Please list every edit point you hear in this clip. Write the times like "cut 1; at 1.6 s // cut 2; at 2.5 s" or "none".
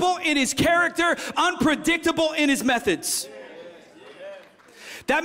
cut 1; at 1.3 s